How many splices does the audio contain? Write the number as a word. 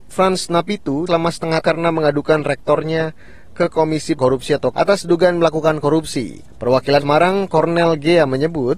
five